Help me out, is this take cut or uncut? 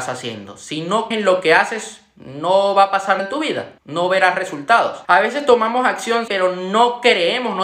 cut